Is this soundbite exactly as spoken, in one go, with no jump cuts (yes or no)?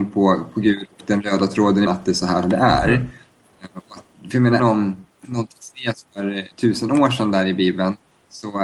no